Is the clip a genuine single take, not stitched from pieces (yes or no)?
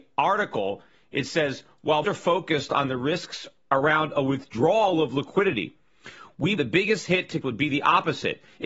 no